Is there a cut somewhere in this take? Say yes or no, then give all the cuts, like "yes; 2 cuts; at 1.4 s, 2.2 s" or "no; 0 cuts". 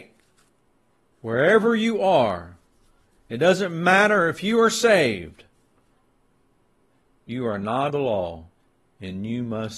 yes; 1 cut; at 7.9 s